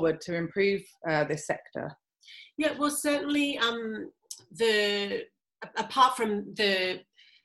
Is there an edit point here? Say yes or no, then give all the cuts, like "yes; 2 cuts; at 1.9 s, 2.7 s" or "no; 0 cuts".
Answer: no; 0 cuts